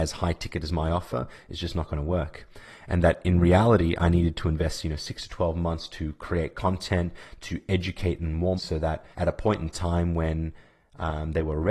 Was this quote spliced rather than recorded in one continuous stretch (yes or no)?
yes